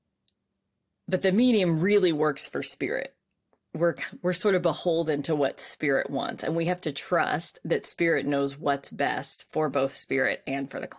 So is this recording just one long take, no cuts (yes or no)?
yes